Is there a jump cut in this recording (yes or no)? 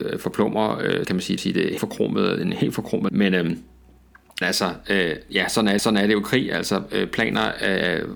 yes